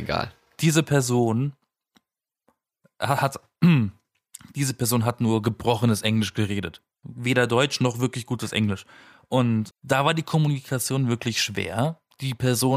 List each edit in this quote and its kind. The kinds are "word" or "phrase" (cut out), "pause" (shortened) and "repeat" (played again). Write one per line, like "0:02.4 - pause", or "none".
0:04.0 - pause
0:06.9 - pause
0:09.7 - word